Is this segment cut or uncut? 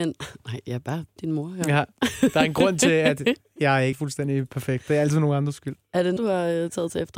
cut